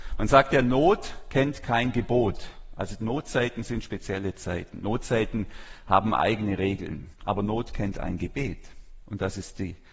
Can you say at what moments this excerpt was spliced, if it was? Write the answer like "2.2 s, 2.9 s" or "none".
7.1 s, 9.0 s